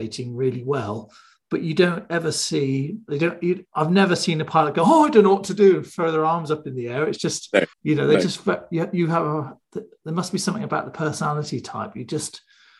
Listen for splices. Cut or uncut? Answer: cut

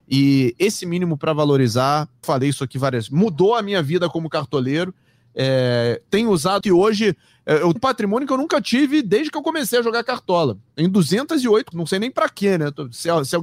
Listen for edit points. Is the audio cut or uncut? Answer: cut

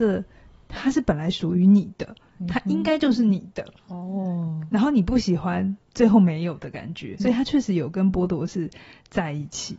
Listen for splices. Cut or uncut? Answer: cut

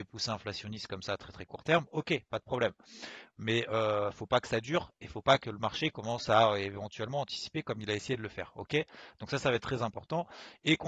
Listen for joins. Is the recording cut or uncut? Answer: uncut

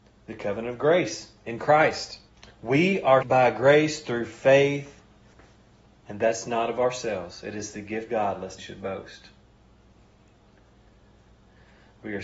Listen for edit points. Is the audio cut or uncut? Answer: cut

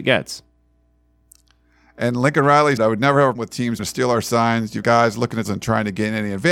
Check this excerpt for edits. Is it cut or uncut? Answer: cut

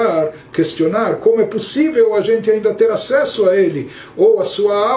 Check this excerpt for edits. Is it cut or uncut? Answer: uncut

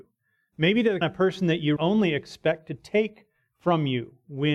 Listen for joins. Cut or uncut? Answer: cut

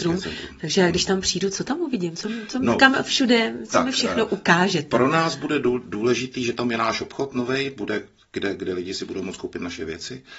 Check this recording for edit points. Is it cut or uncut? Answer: uncut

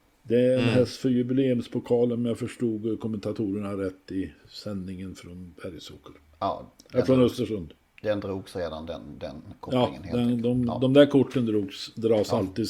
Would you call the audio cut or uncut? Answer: uncut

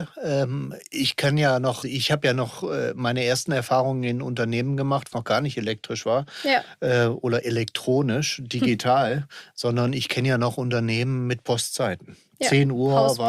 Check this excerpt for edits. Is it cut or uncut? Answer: cut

